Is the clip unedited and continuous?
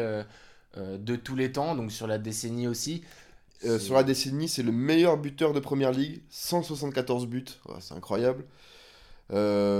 yes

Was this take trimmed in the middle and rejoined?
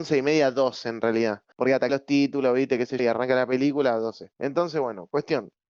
yes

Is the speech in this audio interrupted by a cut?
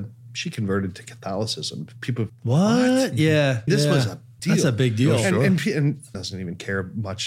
yes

